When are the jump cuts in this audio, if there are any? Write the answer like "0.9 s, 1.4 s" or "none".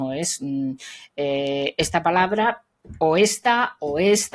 none